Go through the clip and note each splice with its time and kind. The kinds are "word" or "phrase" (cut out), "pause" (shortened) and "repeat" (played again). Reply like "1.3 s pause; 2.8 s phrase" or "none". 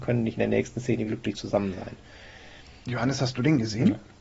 1.1 s word